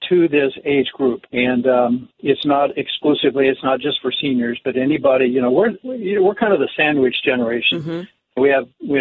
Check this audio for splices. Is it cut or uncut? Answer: cut